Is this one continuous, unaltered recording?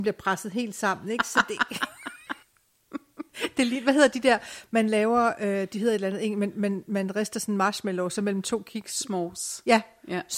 no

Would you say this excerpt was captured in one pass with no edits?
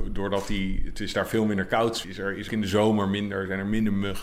no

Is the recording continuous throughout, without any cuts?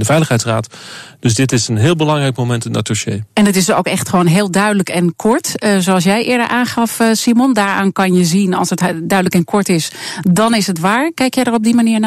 yes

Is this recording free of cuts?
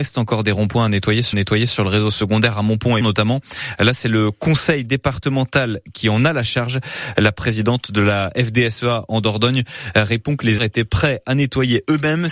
no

